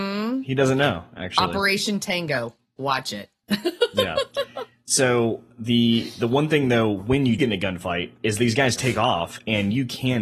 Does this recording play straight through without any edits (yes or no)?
no